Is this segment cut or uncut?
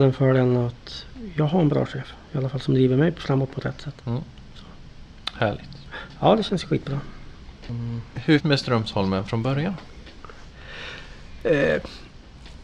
cut